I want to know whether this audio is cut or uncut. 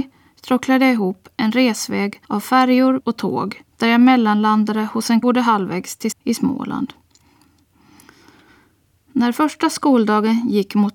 cut